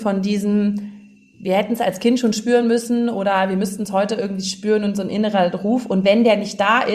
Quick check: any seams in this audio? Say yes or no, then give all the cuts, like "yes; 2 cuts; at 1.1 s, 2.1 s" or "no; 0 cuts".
no; 0 cuts